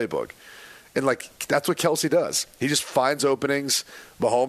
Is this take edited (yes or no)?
no